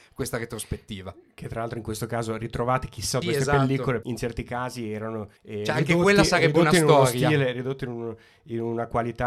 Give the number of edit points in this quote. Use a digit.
3